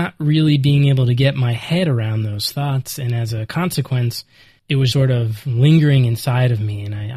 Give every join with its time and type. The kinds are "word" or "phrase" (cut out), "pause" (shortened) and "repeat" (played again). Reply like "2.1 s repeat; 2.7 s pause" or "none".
4.6 s word; 4.9 s word